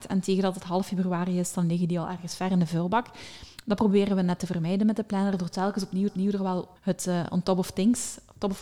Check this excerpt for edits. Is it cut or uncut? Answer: cut